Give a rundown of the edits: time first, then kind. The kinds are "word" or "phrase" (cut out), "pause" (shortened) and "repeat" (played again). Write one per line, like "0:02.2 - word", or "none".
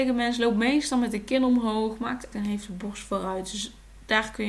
0:02.3 - word